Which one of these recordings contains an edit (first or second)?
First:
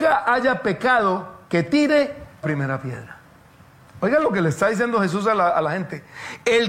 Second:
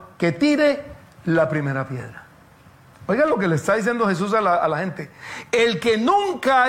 first